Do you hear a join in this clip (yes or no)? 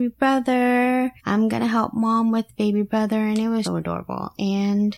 yes